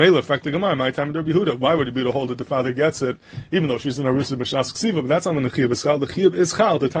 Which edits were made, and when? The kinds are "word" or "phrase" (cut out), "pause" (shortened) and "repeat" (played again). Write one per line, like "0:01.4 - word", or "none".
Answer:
none